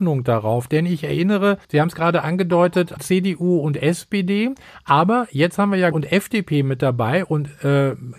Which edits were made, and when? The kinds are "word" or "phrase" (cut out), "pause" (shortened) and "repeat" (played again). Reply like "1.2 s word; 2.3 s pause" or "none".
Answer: 1.6 s pause; 3.0 s word; 5.9 s word